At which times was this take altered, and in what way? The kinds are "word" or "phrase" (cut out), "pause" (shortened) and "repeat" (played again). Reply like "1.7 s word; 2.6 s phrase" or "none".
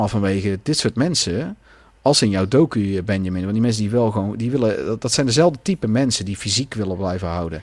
none